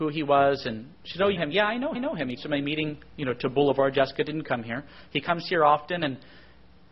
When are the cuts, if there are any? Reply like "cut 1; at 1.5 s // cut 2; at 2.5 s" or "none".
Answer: cut 1; at 1.4 s // cut 2; at 2.0 s // cut 3; at 2.4 s

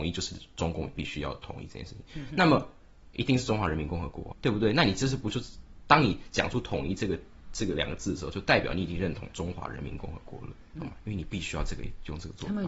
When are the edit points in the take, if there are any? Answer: cut 1; at 4.3 s // cut 2; at 10.7 s

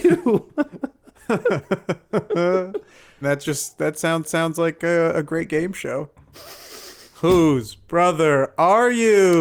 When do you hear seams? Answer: cut 1; at 4.2 s

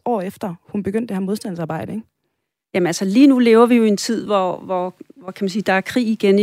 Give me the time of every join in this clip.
none

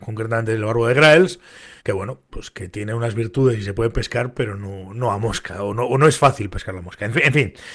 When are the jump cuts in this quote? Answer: cut 1; at 1.8 s

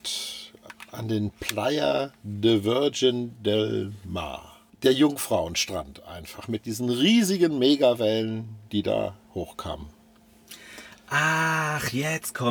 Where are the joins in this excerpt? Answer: cut 1; at 8.7 s // cut 2; at 9.2 s

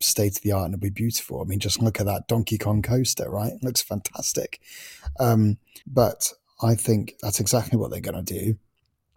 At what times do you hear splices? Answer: cut 1; at 5.8 s

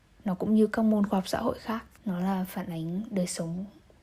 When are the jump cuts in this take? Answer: cut 1; at 2.0 s

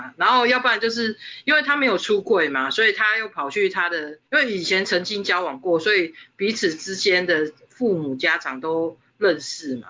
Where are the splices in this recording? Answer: cut 1; at 4.3 s

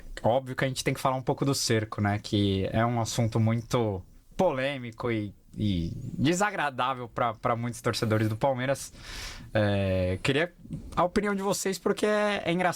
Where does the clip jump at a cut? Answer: none

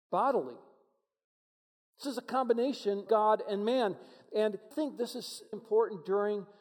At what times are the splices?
cut 1; at 2.0 s // cut 2; at 3.1 s // cut 3; at 4.7 s // cut 4; at 5.5 s

